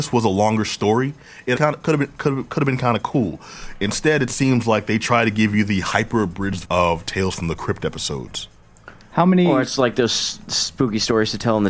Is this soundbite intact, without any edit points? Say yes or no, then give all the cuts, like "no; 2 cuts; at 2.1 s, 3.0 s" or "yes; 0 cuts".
no; 2 cuts; at 1.6 s, 6.6 s